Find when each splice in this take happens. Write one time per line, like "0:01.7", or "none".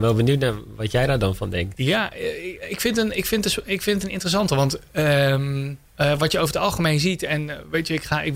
0:05.9